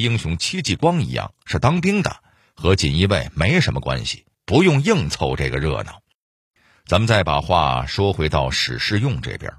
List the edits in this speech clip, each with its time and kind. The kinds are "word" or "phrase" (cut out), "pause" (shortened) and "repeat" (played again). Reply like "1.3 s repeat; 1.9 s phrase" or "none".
4.3 s pause